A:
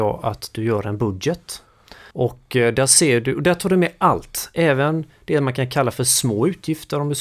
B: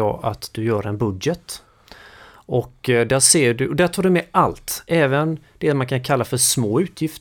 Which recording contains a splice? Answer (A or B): A